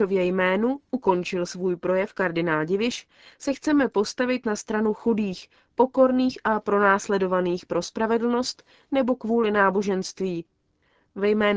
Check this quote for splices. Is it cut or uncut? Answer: uncut